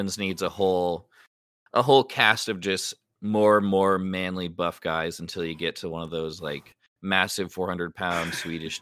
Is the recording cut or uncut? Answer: uncut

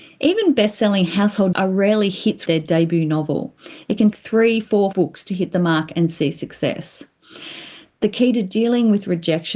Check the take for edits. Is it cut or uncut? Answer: cut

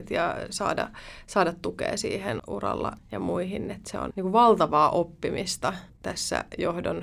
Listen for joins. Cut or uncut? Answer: cut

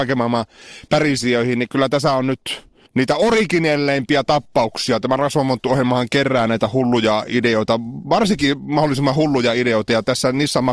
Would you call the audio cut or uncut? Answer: cut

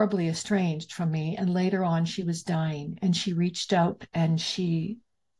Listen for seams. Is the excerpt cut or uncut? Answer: cut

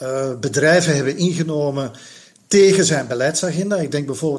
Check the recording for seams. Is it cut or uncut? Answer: uncut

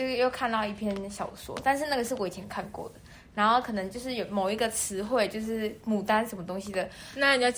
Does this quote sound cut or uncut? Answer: uncut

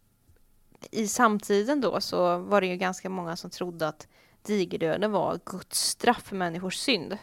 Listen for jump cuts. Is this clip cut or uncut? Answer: uncut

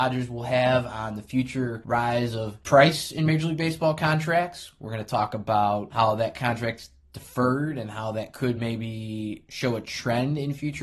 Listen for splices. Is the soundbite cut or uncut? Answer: uncut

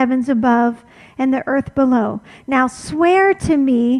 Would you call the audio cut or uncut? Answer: uncut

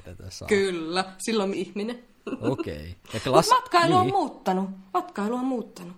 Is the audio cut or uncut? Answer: cut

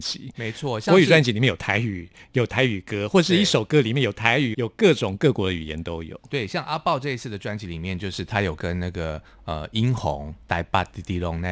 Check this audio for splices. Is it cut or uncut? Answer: cut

